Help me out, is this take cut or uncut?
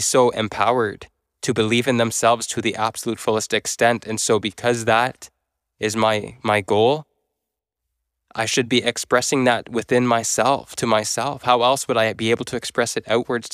uncut